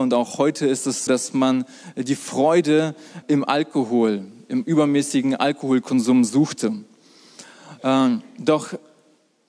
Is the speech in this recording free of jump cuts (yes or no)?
no